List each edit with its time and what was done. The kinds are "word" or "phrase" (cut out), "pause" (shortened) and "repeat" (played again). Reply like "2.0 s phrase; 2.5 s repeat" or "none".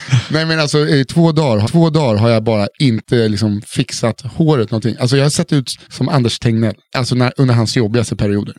1.6 s repeat